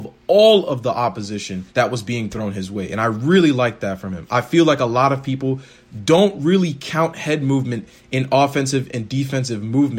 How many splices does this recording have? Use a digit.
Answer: 1